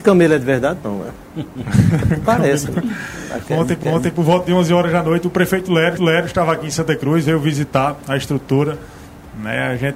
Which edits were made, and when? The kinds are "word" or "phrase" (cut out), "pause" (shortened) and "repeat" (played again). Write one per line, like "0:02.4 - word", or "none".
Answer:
0:03.8 - repeat
0:06.0 - repeat